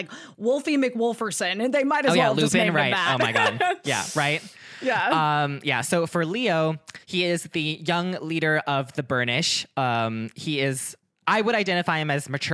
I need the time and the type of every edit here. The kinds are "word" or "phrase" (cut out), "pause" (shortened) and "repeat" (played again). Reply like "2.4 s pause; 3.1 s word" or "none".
7.0 s pause